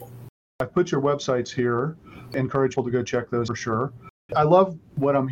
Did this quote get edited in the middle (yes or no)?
yes